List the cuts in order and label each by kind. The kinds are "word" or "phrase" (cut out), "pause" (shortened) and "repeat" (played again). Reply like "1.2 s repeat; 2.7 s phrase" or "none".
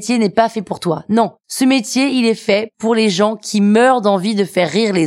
none